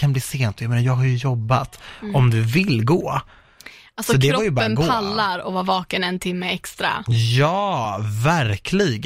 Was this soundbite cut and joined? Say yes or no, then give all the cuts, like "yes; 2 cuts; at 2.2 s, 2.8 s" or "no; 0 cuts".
no; 0 cuts